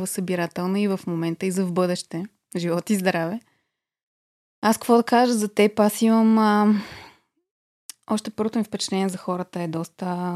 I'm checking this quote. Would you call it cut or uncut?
uncut